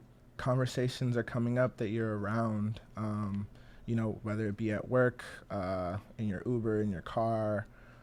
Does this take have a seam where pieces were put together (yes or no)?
no